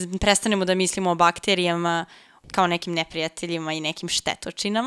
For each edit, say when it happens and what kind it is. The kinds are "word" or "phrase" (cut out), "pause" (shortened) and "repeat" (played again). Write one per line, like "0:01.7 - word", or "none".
none